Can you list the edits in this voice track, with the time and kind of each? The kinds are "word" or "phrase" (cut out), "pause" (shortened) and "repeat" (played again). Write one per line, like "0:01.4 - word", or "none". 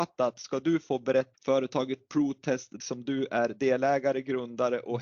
0:01.3 - word
0:02.8 - word